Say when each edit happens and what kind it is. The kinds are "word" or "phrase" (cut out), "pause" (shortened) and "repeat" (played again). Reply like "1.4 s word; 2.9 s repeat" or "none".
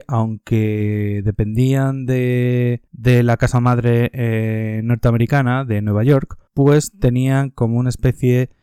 2.9 s pause; 6.5 s pause